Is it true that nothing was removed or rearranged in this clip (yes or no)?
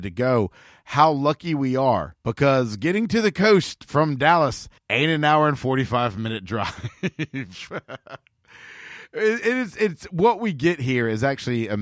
no